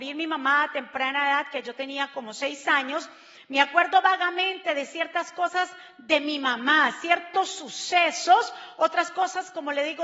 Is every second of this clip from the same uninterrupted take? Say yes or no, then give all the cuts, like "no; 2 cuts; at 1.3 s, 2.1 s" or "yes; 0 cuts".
yes; 0 cuts